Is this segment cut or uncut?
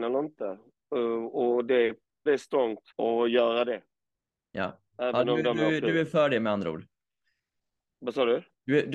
cut